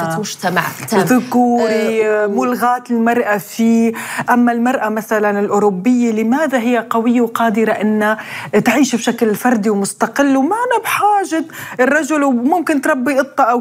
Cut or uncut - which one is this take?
uncut